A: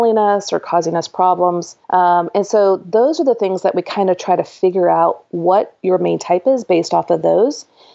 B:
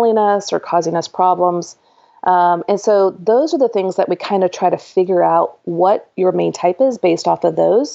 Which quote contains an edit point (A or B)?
A